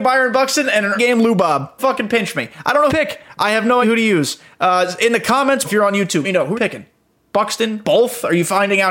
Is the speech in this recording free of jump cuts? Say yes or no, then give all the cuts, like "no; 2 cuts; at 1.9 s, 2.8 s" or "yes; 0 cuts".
no; 8 cuts; at 0.9 s, 1.8 s, 2.9 s, 3.8 s, 5.6 s, 6.2 s, 6.6 s, 7.8 s